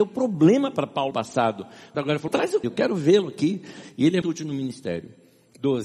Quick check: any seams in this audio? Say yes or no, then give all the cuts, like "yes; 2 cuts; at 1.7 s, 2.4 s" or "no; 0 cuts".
yes; 5 cuts; at 1.1 s, 1.9 s, 2.3 s, 2.6 s, 4.2 s